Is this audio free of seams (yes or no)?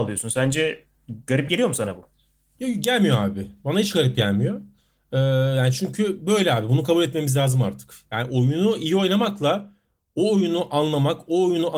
yes